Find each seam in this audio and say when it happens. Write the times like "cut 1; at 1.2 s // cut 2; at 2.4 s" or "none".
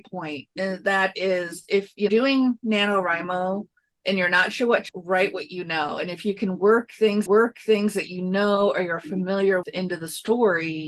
cut 1; at 2.1 s // cut 2; at 3.9 s // cut 3; at 4.9 s // cut 4; at 7.3 s // cut 5; at 9.6 s